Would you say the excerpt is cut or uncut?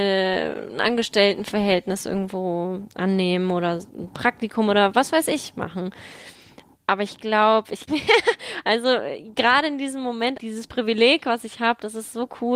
cut